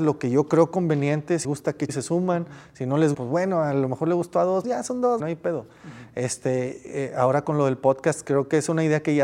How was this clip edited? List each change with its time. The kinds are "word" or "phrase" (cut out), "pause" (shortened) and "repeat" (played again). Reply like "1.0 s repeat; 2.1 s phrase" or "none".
1.4 s word; 1.9 s word; 3.1 s word; 4.6 s word; 5.2 s word